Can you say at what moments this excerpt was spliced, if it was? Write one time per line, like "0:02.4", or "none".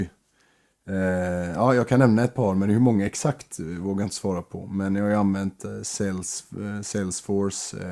none